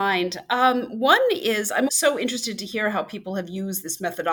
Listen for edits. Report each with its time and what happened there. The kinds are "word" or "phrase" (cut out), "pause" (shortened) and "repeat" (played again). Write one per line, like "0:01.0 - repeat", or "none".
0:01.9 - word